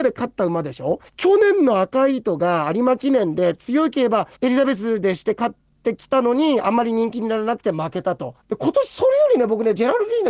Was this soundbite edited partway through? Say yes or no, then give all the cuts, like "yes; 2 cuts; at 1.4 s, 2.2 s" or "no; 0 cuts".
yes; 3 cuts; at 1.1 s, 4.4 s, 8.4 s